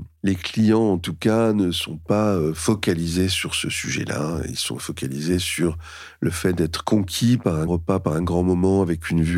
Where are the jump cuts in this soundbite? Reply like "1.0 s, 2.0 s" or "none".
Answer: 7.7 s